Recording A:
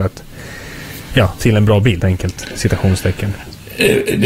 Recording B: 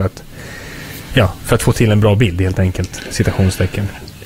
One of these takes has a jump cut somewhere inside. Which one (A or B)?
A